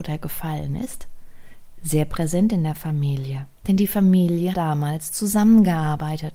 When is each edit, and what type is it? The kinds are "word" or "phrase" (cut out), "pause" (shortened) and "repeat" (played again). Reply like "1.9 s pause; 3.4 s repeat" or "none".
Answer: 3.6 s pause; 4.5 s word